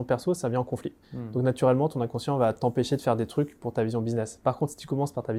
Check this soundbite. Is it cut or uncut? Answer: cut